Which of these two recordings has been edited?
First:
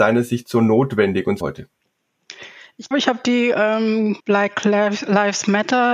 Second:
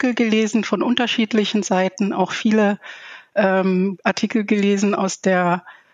first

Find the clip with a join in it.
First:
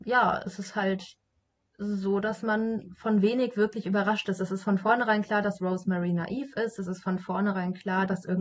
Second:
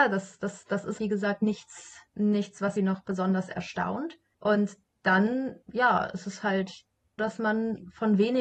second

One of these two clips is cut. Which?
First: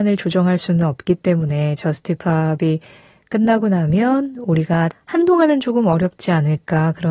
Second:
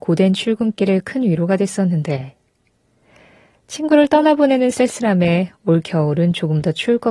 first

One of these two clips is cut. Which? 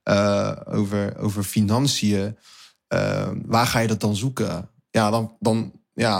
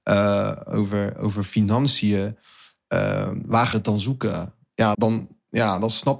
second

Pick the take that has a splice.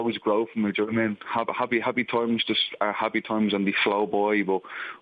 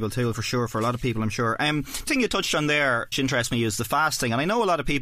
second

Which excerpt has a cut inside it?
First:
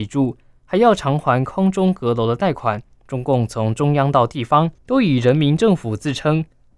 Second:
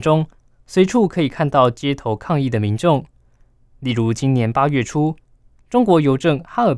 first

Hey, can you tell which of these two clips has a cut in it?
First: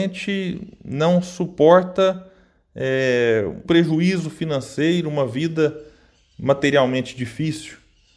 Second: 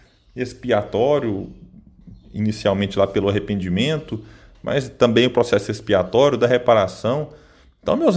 first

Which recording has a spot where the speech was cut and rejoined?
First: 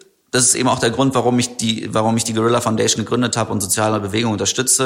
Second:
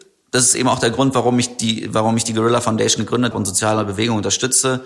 second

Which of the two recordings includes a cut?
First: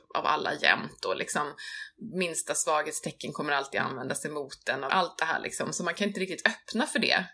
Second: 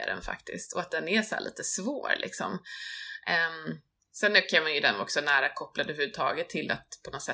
first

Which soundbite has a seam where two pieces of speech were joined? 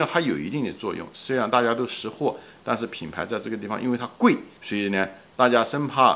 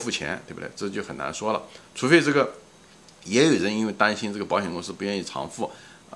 first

